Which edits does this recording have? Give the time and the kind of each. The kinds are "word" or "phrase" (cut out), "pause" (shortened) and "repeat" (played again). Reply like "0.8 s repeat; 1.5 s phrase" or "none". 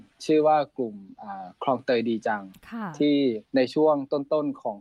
3.5 s pause

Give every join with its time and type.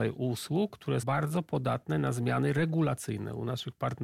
1.0 s word

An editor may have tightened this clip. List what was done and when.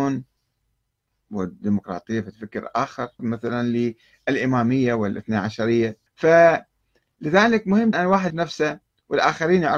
3.2 s word; 6.1 s pause; 7.9 s word; 8.3 s word

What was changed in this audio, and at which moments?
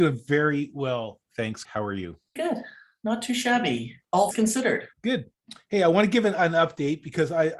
1.6 s word; 2.4 s word; 4.3 s word; 4.9 s pause

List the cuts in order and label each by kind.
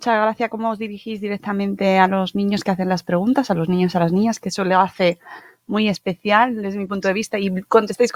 none

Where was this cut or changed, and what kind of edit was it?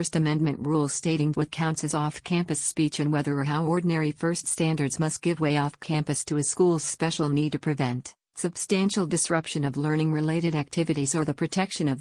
1.3 s word; 4.4 s word

